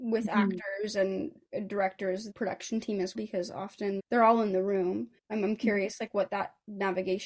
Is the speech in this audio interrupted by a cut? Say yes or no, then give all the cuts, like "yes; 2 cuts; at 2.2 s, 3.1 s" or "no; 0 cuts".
yes; 4 cuts; at 2.3 s, 3.1 s, 4.0 s, 5.2 s